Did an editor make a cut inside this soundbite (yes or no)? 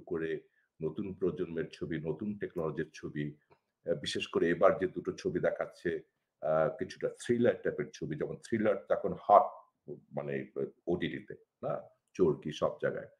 no